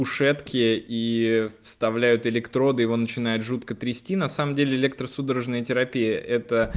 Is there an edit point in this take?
no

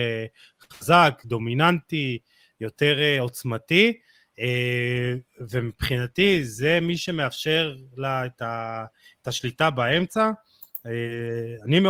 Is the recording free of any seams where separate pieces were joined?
yes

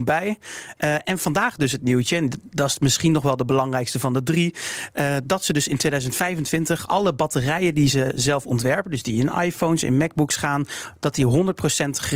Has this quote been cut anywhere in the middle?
no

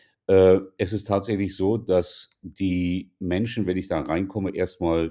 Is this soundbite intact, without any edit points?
yes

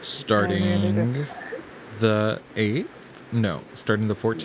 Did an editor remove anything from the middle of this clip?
yes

